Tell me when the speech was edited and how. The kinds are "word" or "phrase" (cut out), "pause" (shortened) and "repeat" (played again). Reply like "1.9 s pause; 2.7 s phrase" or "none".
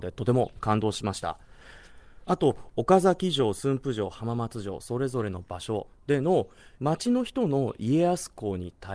6.7 s pause